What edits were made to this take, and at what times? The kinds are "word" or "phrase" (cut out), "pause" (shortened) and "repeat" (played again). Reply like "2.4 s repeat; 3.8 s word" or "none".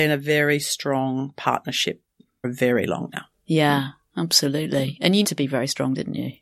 2.4 s word; 3.1 s word; 5.2 s word